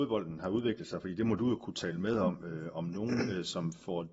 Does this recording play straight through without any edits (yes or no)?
yes